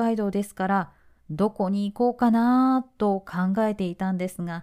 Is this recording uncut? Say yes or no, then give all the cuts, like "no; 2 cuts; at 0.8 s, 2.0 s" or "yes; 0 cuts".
yes; 0 cuts